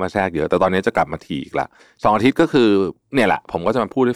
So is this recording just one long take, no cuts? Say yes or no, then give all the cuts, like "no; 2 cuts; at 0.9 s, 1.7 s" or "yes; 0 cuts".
no; 1 cut; at 1.8 s